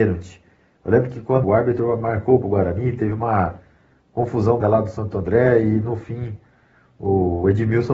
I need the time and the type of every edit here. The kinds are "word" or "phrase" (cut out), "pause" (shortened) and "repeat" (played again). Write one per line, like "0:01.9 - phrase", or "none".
0:01.4 - word
0:02.4 - phrase
0:04.6 - word